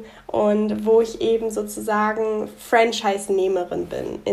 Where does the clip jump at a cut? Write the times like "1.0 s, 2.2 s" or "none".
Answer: none